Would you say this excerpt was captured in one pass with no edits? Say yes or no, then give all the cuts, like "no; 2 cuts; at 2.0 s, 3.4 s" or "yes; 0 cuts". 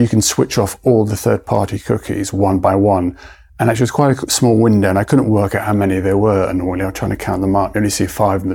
yes; 0 cuts